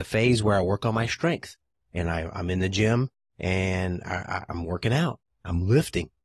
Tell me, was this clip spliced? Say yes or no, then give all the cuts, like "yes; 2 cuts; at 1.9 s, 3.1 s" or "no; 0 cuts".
no; 0 cuts